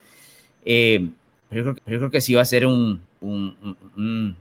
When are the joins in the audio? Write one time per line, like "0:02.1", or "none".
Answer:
0:01.8
0:03.0